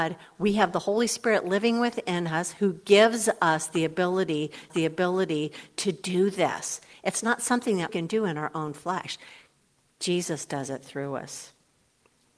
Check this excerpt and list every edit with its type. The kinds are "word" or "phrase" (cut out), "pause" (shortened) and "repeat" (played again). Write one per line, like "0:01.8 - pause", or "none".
0:04.7 - repeat
0:07.9 - word